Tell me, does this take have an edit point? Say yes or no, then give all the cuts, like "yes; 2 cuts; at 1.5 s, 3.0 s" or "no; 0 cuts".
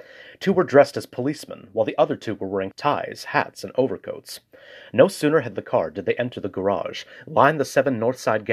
yes; 2 cuts; at 2.7 s, 5.5 s